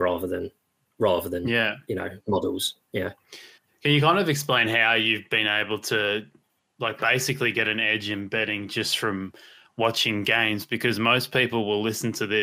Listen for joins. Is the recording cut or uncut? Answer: uncut